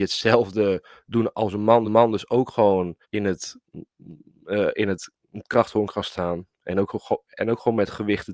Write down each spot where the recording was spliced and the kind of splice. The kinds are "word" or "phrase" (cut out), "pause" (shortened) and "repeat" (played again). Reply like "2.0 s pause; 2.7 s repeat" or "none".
1.8 s repeat; 3.0 s pause